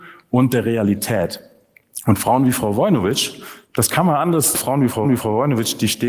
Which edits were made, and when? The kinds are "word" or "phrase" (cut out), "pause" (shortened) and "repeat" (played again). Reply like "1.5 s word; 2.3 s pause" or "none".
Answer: 3.6 s pause; 4.5 s phrase; 5.0 s repeat